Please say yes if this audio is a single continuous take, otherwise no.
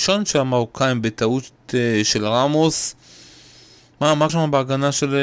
no